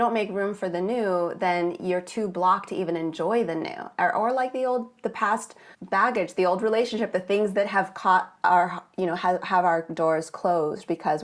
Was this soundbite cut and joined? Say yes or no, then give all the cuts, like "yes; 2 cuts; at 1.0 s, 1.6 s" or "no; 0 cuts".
yes; 1 cut; at 5.7 s